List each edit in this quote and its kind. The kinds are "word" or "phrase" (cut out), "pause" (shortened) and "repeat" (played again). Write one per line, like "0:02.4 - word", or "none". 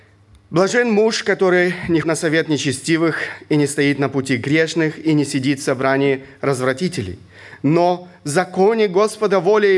0:02.0 - word